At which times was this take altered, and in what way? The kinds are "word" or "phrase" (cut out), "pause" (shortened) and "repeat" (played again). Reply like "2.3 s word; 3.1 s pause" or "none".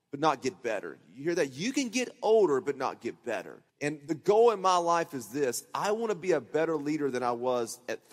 3.7 s pause